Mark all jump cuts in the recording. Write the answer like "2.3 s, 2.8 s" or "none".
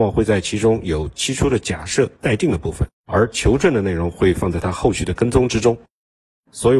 2.2 s, 2.9 s